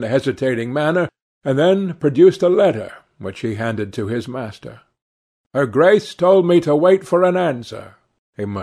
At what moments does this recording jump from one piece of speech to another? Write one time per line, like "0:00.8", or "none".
none